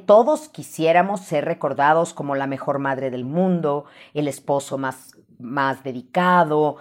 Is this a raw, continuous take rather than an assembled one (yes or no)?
yes